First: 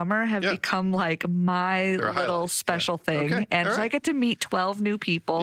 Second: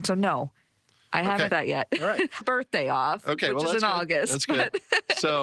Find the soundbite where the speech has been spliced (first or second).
second